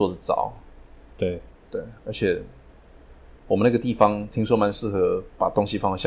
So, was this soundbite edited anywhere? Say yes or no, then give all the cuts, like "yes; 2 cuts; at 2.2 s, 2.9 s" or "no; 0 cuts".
yes; 1 cut; at 2.0 s